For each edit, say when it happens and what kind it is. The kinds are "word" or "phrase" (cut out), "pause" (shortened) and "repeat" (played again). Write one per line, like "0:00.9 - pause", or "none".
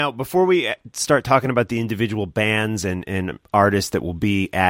none